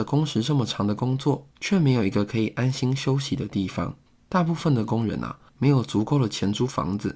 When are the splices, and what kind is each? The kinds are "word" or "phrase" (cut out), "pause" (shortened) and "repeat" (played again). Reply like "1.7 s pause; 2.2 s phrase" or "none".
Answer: 1.5 s pause; 4.1 s pause; 5.5 s pause